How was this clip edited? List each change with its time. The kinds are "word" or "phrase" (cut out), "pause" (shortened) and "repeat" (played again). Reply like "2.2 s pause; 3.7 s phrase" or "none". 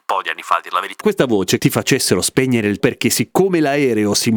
1.0 s word; 1.6 s phrase; 2.8 s word